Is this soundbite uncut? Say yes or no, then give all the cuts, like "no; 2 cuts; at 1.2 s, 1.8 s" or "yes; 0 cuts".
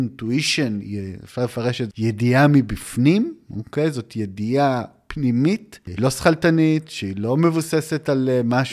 no; 2 cuts; at 1.9 s, 6.0 s